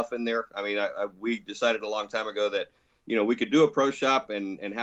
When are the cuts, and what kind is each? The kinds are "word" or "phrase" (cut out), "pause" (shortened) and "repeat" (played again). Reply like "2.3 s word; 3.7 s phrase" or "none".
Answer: none